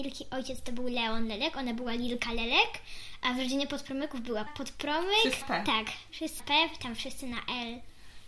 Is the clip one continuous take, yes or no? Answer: no